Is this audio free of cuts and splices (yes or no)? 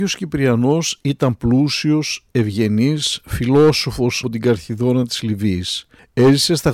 no